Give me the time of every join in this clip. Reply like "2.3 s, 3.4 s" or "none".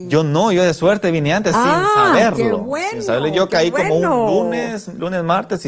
none